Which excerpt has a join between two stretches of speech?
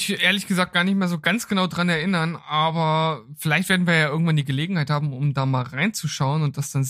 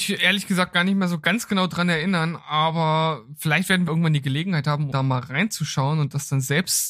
second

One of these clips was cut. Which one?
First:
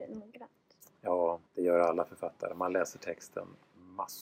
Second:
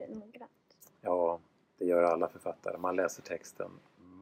first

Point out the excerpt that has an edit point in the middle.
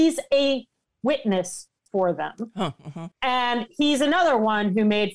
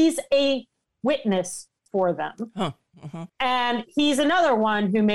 first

